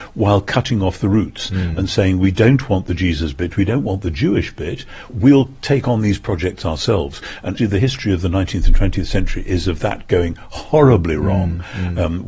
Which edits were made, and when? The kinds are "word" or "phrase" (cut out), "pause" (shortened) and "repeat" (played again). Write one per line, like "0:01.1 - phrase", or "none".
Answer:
0:05.1 - word
0:07.6 - word